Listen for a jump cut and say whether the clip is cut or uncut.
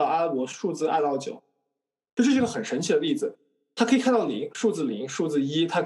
uncut